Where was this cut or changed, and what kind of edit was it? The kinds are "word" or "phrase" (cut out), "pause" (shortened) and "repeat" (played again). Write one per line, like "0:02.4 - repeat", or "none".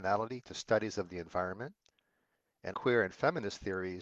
0:02.7 - word